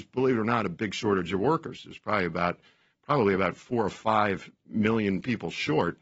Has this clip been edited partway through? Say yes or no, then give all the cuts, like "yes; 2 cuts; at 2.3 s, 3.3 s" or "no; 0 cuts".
no; 0 cuts